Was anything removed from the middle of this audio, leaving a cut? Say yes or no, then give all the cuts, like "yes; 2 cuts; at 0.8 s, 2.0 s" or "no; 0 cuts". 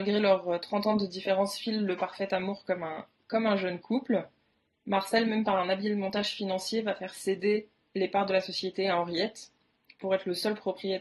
no; 0 cuts